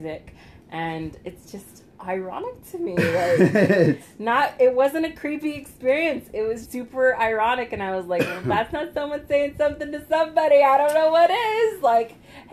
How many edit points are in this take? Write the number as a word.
one